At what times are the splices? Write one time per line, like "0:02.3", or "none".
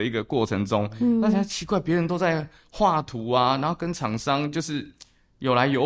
none